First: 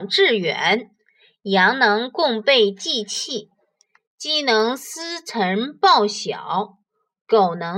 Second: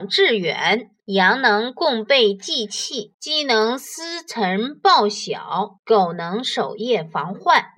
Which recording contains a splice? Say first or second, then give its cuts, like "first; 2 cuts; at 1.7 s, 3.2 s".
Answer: second; 3 cuts; at 1.0 s, 3.1 s, 5.8 s